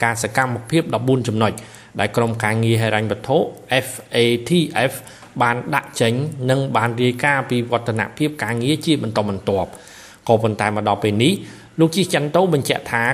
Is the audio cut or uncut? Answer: uncut